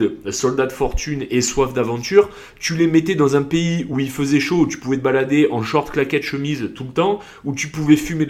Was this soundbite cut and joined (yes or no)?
no